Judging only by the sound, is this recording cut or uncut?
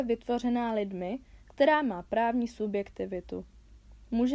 uncut